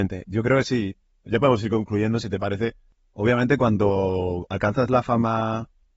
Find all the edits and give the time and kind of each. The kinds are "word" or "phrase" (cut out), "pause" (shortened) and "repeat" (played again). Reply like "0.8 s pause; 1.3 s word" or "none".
none